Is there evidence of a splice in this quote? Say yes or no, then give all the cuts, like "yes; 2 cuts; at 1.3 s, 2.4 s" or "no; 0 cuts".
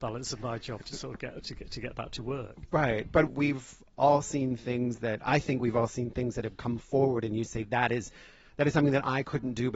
yes; 1 cut; at 3.3 s